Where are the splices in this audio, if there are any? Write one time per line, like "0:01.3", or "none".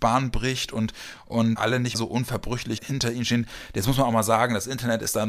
0:01.6
0:01.9
0:02.8